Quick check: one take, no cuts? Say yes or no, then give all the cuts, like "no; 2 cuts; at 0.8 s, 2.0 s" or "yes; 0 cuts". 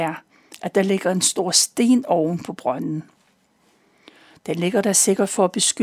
yes; 0 cuts